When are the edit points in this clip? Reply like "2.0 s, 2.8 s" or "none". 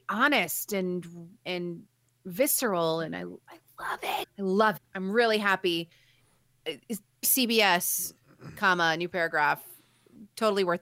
1.4 s, 4.2 s, 4.8 s, 7.2 s